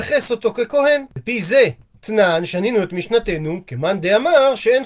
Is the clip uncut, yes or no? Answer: yes